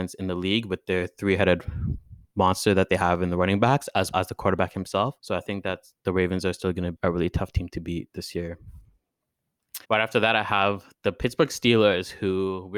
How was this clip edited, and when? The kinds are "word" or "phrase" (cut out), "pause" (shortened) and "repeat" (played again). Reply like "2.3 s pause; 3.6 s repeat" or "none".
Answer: 4.1 s word; 5.2 s pause; 6.9 s word; 9.8 s pause